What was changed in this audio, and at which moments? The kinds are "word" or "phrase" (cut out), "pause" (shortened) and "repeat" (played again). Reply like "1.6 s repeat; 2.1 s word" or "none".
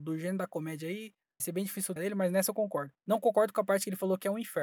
1.4 s word; 2.0 s word; 3.0 s pause